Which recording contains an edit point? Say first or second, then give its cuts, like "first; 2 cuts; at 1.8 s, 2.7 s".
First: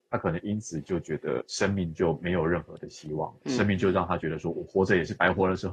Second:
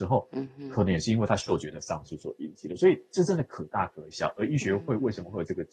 first; 1 cut; at 1.4 s